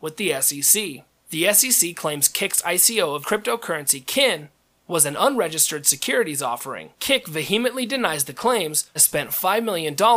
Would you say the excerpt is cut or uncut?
cut